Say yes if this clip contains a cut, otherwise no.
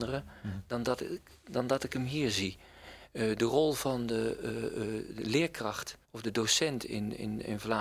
yes